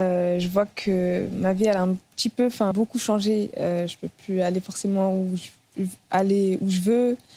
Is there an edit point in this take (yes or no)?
yes